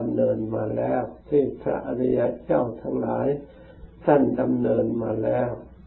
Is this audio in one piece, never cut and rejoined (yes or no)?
no